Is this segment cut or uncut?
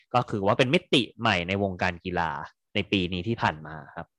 cut